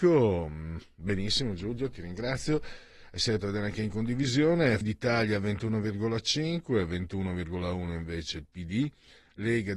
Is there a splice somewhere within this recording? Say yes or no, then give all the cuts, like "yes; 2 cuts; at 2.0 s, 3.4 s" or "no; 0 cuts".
yes; 2 cuts; at 3.4 s, 4.8 s